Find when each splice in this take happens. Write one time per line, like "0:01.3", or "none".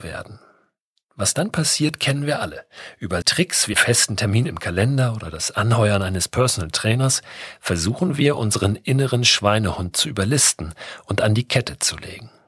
0:03.2
0:03.7